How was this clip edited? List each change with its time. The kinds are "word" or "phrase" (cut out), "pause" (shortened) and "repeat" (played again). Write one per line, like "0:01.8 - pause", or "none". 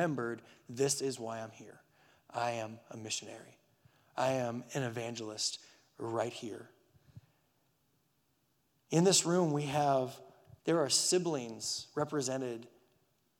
0:10.6 - pause